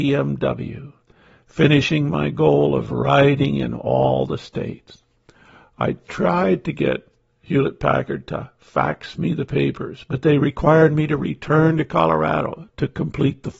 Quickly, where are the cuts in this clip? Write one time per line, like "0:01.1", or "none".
none